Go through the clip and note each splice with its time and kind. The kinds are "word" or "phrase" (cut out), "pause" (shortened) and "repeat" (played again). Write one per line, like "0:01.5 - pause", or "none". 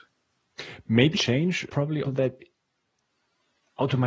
0:01.1 - word
0:01.7 - word
0:02.0 - word